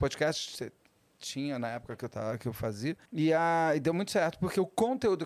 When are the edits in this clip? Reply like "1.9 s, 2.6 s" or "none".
3.0 s

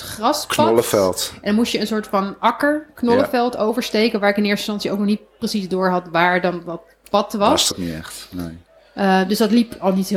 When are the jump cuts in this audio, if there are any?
7.7 s

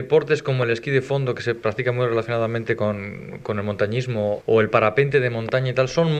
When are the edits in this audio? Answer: 4.4 s

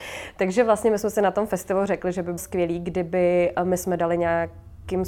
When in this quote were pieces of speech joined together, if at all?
2.4 s

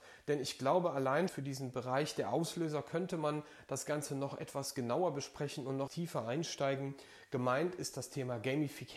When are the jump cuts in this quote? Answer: 1.3 s, 5.9 s

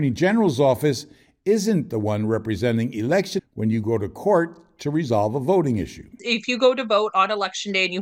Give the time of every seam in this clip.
3.4 s

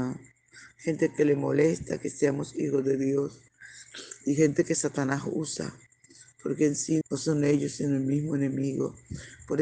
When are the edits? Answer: 7.0 s

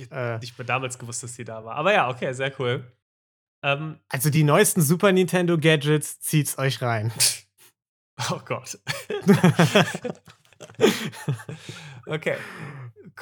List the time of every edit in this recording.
none

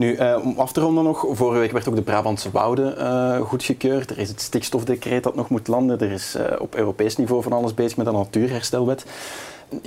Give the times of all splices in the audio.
none

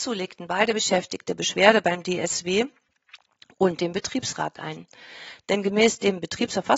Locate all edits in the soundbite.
none

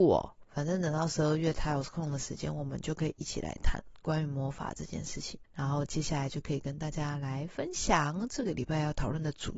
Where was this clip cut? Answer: 5.4 s

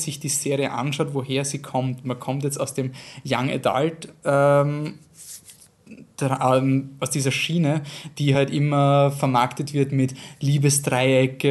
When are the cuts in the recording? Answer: none

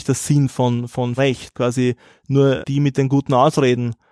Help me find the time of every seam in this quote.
1.2 s, 1.5 s, 2.6 s

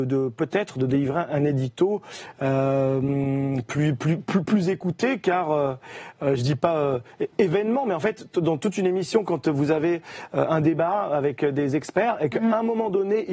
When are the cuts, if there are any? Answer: 7.3 s

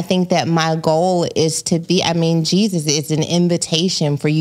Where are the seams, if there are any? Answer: none

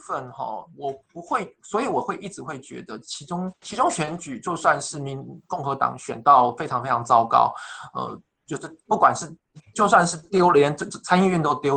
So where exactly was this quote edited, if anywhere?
3.5 s

